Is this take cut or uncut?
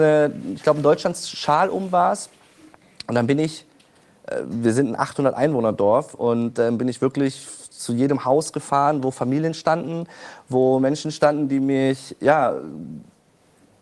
uncut